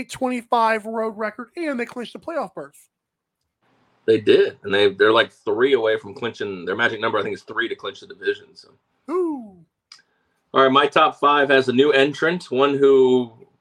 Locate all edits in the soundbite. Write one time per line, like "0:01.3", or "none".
none